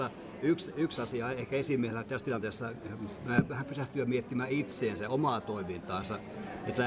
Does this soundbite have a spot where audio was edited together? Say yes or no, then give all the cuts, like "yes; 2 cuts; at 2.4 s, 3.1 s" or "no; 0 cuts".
no; 0 cuts